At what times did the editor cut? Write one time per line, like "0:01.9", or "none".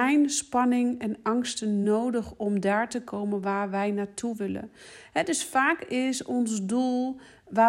none